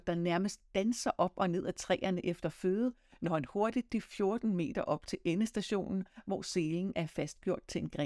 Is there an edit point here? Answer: no; 0 cuts

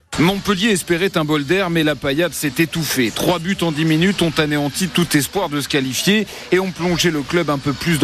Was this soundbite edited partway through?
no; 0 cuts

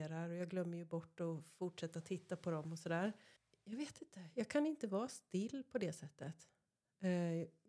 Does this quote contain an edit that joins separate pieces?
yes; 1 cut; at 3.4 s

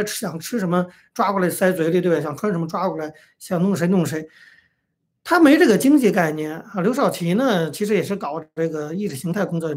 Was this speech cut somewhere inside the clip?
no; 0 cuts

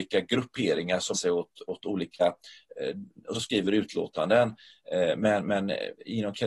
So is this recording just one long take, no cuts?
no; 2 cuts; at 1.1 s, 3.3 s

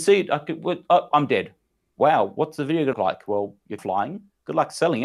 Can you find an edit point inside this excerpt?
yes; 3 cuts; at 1.1 s, 2.9 s, 3.8 s

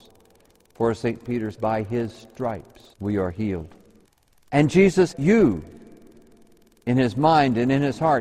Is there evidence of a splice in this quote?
yes; 4 cuts; at 1.5 s, 2.9 s, 4.0 s, 5.1 s

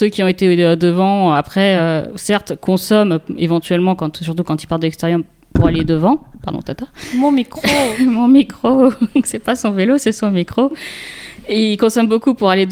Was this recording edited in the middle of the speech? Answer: no; 0 cuts

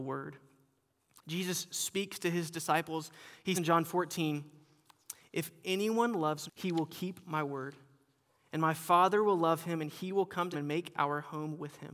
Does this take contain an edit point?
yes; 3 cuts; at 3.5 s, 6.5 s, 10.5 s

